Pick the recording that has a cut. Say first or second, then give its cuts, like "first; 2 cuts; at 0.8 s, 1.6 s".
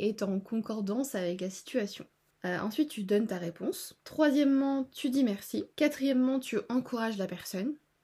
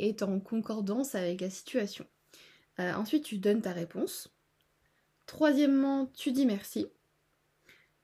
first; 3 cuts; at 2.3 s, 4.0 s, 5.7 s